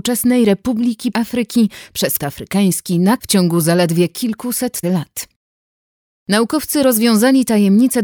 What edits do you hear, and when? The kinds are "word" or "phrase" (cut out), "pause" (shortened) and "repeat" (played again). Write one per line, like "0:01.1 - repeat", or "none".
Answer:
0:01.1 - word
0:02.2 - word
0:03.2 - word
0:04.8 - word